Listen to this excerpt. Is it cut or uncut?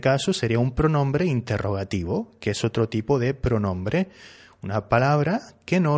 uncut